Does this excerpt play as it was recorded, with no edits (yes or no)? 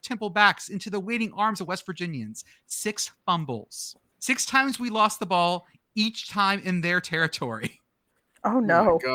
yes